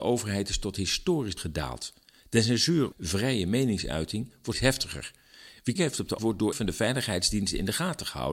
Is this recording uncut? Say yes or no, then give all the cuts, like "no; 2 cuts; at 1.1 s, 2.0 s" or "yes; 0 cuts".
no; 6 cuts; at 1.4 s, 2.9 s, 4.5 s, 5.8 s, 6.2 s, 6.5 s